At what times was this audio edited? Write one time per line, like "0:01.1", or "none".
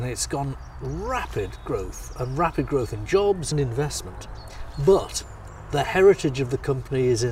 0:03.5